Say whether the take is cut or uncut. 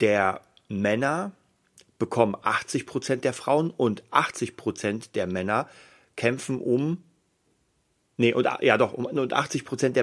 uncut